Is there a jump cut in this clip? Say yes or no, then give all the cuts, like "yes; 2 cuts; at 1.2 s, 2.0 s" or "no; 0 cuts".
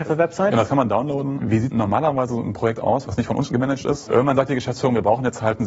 no; 0 cuts